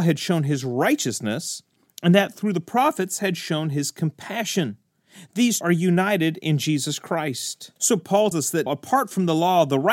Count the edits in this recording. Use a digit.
4